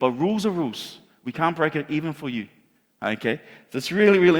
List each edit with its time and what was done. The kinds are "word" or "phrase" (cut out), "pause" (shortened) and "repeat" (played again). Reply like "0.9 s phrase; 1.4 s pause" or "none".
none